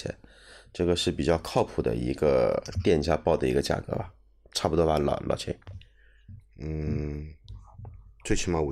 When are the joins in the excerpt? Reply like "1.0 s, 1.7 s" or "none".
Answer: 6.5 s